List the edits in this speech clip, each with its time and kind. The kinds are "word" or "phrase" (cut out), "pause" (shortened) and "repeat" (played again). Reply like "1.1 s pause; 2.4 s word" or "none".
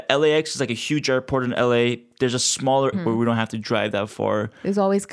2.9 s phrase